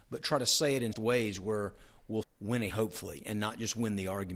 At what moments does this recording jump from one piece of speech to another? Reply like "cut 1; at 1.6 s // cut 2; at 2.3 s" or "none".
cut 1; at 0.9 s // cut 2; at 2.2 s // cut 3; at 2.7 s

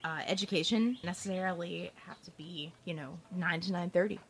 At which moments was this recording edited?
cut 1; at 1.0 s // cut 2; at 2.8 s // cut 3; at 3.2 s

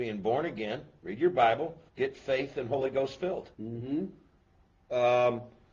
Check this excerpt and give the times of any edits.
cut 1; at 1.9 s // cut 2; at 3.5 s

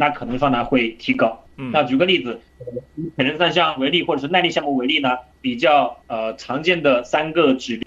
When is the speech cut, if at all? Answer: cut 1; at 6.0 s

